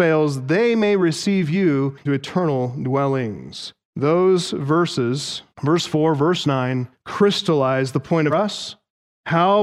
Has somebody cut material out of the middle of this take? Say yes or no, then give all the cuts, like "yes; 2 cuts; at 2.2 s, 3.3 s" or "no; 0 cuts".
yes; 4 cuts; at 2.0 s, 3.8 s, 5.5 s, 8.3 s